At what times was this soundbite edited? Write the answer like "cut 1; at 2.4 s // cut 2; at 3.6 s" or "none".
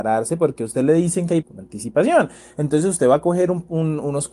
cut 1; at 1.4 s